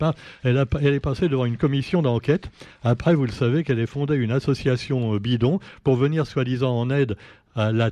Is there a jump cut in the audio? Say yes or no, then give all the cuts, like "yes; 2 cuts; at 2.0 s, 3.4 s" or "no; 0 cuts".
no; 0 cuts